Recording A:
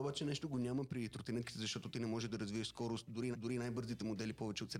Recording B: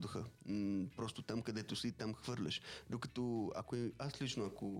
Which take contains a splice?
A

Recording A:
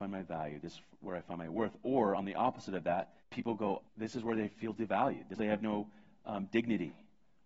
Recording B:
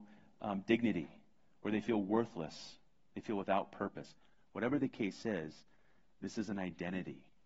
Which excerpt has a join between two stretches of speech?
A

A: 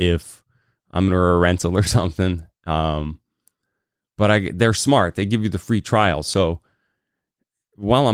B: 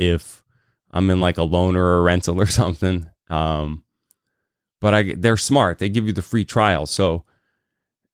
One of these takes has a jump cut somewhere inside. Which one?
A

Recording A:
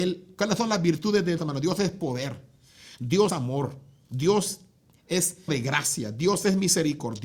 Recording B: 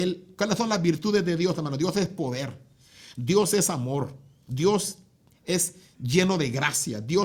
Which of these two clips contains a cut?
A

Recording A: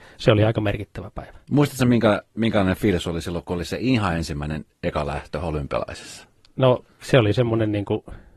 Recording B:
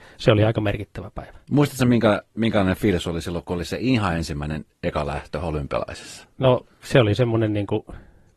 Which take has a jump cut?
B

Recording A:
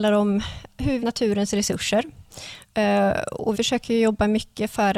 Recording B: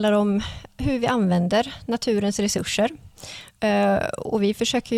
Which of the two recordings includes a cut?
A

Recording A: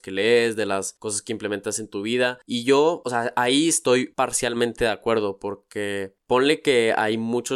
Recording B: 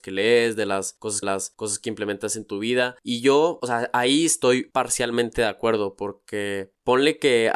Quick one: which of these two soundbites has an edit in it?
B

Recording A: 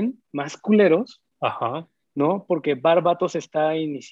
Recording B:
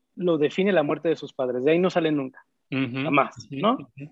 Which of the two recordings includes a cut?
A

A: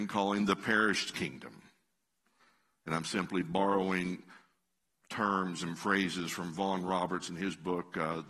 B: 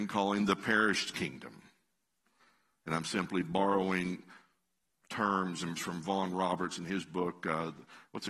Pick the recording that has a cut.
B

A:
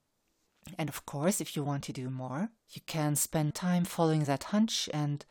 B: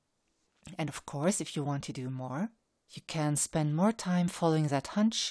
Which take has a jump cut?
A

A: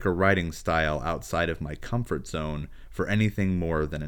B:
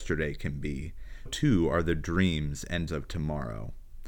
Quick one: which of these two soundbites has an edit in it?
B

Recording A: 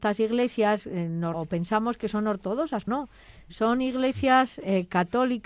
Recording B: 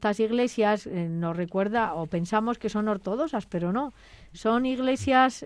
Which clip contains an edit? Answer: A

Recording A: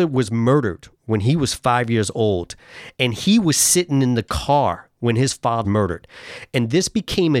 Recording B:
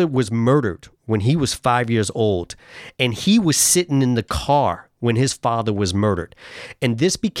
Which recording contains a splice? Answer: A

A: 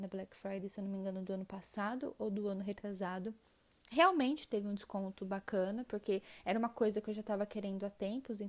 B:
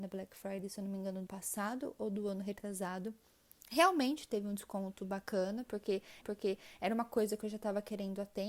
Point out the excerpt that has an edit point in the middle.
B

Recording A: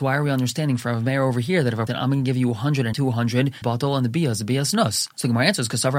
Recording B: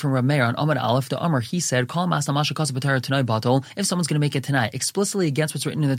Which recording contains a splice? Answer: A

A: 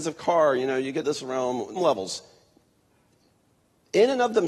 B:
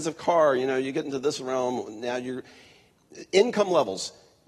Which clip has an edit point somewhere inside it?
A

